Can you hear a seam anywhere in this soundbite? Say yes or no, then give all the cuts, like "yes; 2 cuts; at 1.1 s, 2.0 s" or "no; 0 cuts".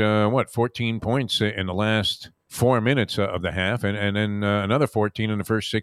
yes; 1 cut; at 2.4 s